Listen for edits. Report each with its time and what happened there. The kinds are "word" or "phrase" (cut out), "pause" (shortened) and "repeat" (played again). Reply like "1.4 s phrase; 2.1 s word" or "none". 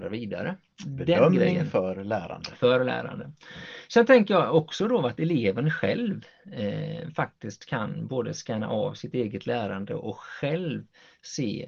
none